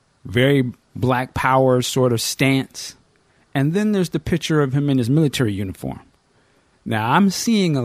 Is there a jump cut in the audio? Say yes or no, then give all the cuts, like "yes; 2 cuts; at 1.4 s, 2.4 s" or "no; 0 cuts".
no; 0 cuts